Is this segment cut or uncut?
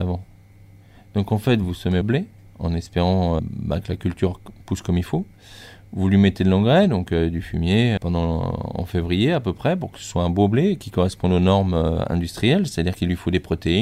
cut